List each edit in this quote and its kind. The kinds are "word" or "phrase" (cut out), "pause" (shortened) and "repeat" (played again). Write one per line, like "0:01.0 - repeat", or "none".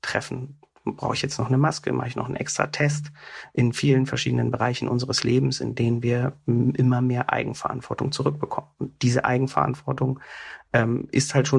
none